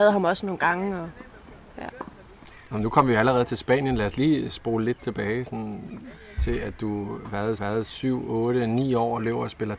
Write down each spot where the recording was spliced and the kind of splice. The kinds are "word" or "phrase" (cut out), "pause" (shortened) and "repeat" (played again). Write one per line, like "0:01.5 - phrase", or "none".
0:07.6 - repeat